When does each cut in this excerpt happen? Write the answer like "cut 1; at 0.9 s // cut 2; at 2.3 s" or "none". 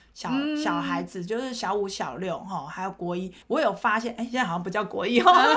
cut 1; at 3.4 s